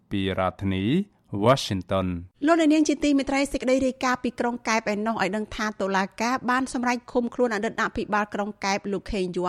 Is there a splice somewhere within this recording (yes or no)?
yes